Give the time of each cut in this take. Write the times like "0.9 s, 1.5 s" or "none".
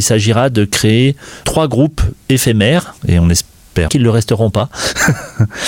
1.4 s, 3.0 s, 3.9 s